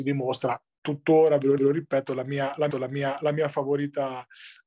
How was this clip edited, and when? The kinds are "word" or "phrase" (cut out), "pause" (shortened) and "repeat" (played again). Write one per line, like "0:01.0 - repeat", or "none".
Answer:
0:01.6 - repeat
0:02.7 - repeat